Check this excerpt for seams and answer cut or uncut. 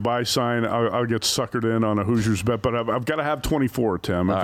uncut